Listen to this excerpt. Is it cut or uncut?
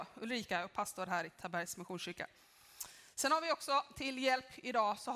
uncut